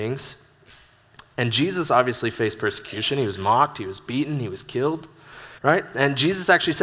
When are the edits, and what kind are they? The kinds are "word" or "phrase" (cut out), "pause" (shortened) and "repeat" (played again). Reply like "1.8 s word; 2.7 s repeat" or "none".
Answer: 5.6 s pause